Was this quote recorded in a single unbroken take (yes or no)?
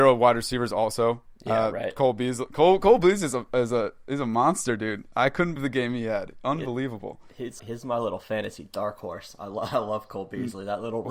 no